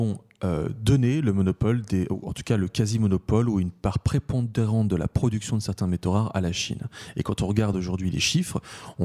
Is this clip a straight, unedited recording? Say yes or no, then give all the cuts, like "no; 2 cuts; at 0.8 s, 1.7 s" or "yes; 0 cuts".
yes; 0 cuts